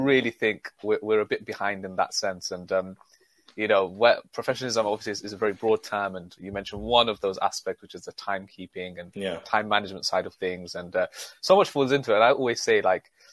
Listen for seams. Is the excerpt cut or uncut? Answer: uncut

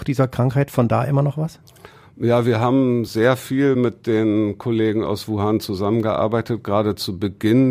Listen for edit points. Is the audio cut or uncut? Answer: uncut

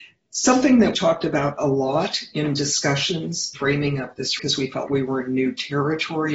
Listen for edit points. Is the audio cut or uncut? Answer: cut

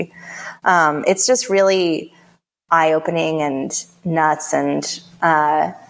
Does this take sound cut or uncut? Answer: uncut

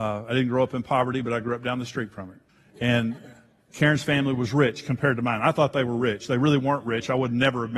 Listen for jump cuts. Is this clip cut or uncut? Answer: cut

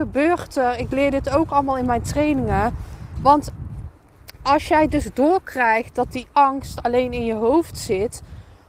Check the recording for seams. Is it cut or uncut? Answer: uncut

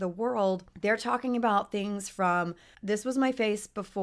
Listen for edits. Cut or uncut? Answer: uncut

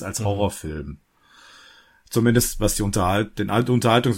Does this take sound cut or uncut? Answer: uncut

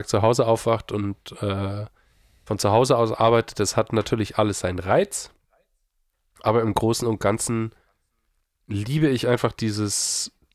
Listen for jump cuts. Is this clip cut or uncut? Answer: uncut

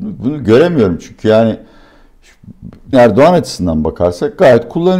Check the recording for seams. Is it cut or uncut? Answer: cut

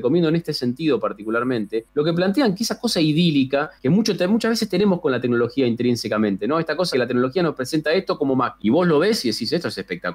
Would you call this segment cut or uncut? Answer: cut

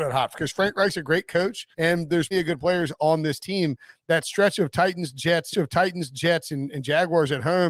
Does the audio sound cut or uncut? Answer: cut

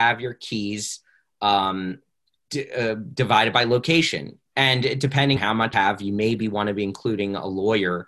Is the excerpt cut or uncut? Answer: cut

